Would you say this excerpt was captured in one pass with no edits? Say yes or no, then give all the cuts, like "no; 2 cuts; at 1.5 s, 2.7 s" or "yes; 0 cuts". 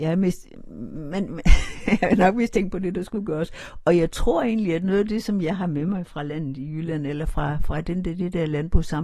yes; 0 cuts